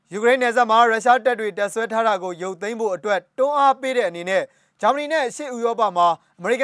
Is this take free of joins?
yes; 0 cuts

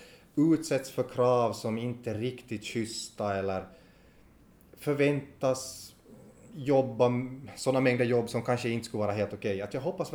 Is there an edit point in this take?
no; 0 cuts

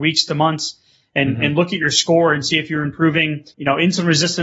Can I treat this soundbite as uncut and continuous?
no; 1 cut; at 3.5 s

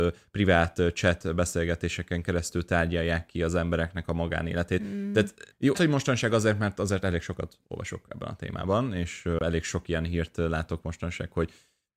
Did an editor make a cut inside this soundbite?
yes; 1 cut; at 5.7 s

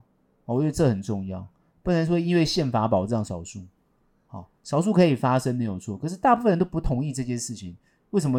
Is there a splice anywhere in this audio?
no; 0 cuts

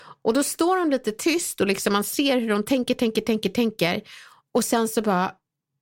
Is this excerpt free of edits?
yes; 0 cuts

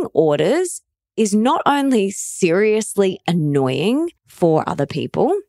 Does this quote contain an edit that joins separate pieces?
yes; 1 cut; at 4.2 s

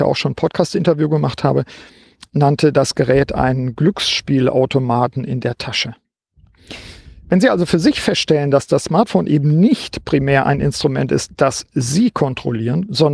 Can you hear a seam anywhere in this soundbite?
no; 0 cuts

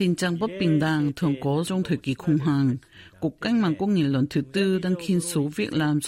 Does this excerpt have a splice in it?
yes; 1 cut; at 1.7 s

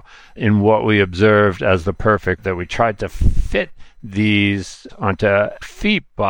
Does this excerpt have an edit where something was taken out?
yes; 2 cuts; at 2.4 s, 4.9 s

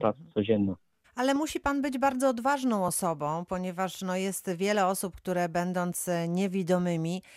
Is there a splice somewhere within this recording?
no; 0 cuts

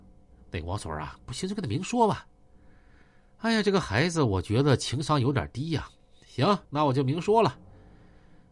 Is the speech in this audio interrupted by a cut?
yes; 1 cut; at 6.6 s

